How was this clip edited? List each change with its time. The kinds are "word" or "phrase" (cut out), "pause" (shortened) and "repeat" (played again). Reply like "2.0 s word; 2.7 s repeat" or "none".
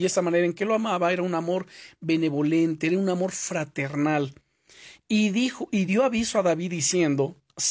none